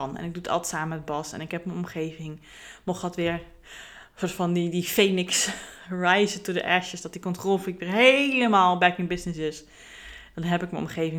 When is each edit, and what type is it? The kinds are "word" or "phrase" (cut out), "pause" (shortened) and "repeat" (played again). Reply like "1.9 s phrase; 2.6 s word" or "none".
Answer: none